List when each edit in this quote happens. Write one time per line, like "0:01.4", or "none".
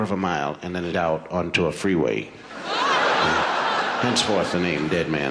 0:00.9